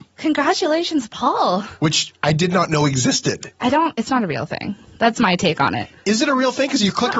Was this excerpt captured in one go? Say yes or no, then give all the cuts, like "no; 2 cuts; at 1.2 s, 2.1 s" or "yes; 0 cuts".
yes; 0 cuts